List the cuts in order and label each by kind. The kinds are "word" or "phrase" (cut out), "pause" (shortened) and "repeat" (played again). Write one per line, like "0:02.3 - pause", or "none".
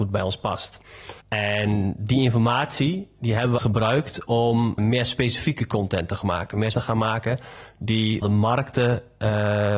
0:01.2 - pause
0:03.6 - phrase
0:04.8 - word
0:06.7 - phrase
0:08.2 - phrase